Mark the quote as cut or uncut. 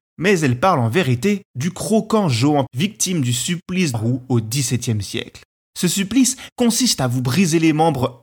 cut